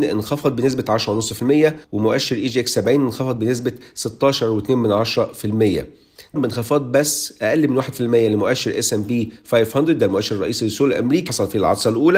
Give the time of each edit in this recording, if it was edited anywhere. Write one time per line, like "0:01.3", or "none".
0:01.8
0:06.4
0:11.3